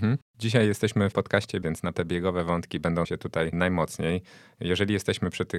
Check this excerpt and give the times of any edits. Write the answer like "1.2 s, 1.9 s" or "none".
1.1 s, 1.6 s, 1.9 s, 3.0 s, 3.5 s